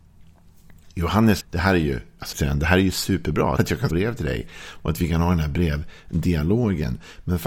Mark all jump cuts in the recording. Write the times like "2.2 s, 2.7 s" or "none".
1.4 s, 2.3 s, 3.6 s, 3.9 s